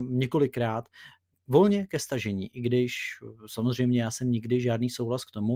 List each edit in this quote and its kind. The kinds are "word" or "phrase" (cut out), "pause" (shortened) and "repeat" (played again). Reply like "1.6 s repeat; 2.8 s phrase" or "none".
none